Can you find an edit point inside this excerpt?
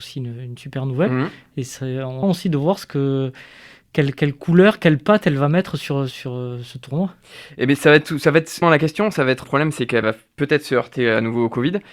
yes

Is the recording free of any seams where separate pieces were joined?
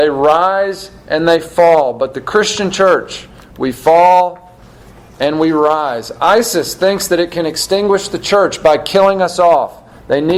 yes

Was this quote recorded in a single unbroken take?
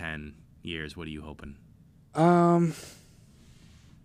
yes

